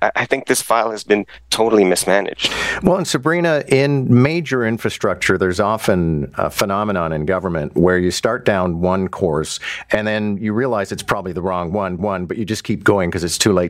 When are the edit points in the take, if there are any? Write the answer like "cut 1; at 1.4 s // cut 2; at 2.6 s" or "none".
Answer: cut 1; at 12.0 s

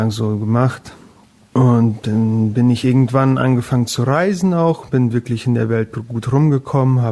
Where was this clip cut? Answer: none

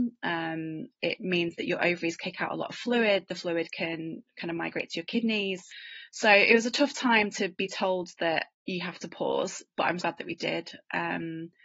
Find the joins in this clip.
cut 1; at 8.5 s // cut 2; at 10.0 s

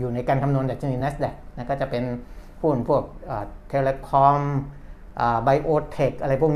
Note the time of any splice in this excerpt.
none

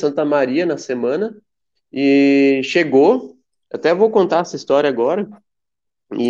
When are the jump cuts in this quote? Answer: none

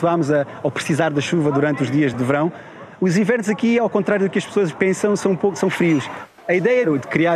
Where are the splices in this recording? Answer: cut 1; at 2.1 s

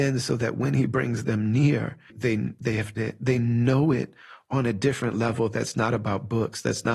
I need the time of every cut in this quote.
cut 1; at 2.1 s // cut 2; at 3.0 s

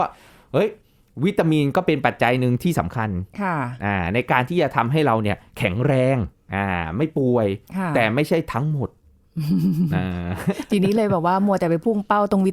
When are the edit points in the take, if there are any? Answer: cut 1; at 6.3 s

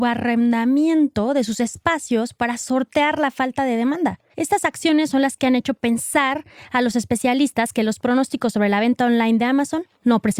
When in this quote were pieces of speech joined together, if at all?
cut 1; at 4.3 s

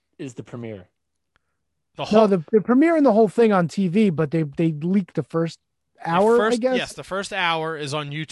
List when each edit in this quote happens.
none

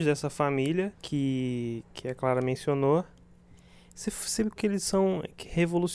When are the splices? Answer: cut 1; at 0.9 s // cut 2; at 4.6 s

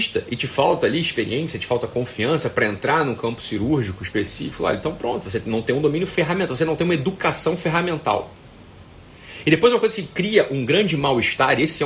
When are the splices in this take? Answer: none

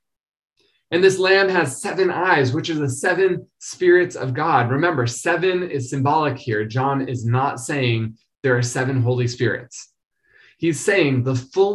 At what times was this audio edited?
none

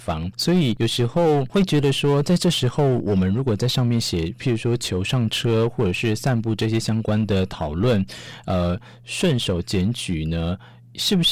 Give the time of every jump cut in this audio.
none

